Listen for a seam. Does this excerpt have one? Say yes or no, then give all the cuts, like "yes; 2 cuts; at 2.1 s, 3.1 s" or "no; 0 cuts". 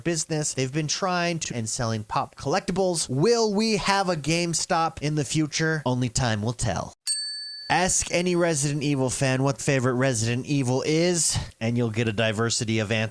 yes; 3 cuts; at 1.5 s, 2.3 s, 9.6 s